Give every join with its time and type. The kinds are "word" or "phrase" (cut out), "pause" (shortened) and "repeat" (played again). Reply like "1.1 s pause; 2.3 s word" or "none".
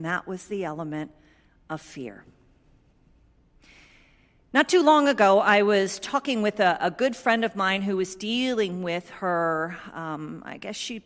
none